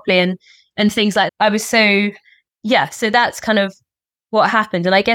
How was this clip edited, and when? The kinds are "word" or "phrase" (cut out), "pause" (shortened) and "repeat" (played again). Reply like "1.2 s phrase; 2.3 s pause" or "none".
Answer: 1.3 s phrase; 2.5 s pause